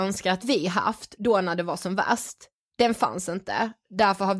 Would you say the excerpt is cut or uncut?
uncut